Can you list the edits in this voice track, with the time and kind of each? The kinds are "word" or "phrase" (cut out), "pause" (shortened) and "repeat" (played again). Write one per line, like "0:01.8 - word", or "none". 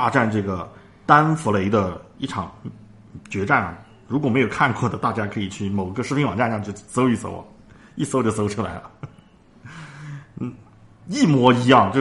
none